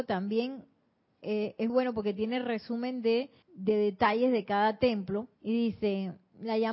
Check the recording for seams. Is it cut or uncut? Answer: cut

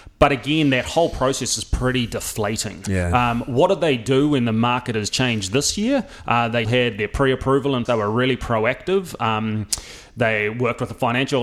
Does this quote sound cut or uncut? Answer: cut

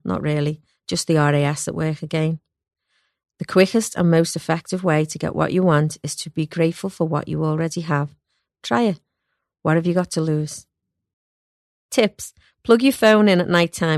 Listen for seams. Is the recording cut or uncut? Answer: uncut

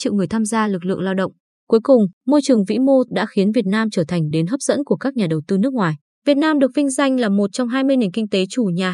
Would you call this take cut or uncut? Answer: cut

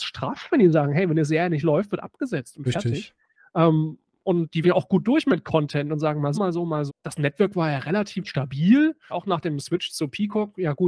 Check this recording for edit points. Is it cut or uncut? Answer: cut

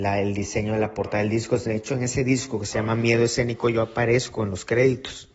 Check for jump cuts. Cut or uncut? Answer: uncut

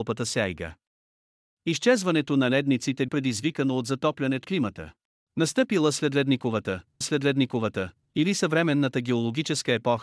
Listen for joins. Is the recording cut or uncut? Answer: cut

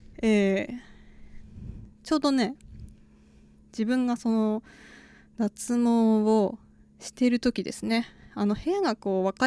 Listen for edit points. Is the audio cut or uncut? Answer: uncut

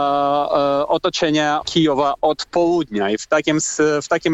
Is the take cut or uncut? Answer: cut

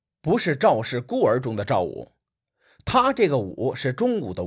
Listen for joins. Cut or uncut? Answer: uncut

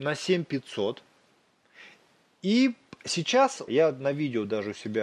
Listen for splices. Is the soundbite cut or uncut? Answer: cut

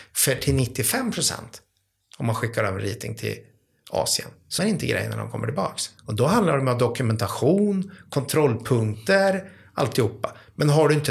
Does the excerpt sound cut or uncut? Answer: cut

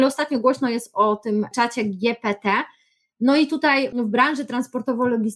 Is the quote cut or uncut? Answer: uncut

